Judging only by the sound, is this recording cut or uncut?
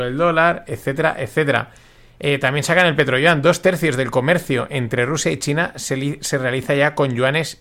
uncut